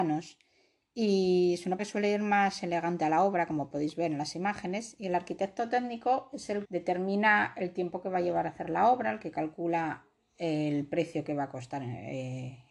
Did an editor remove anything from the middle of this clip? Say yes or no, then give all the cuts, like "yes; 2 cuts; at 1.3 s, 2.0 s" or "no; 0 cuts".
yes; 2 cuts; at 1.8 s, 6.6 s